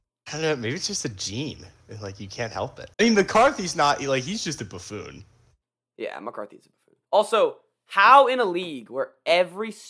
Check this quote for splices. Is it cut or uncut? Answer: cut